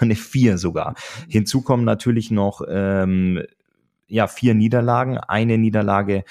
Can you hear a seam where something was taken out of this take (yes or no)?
no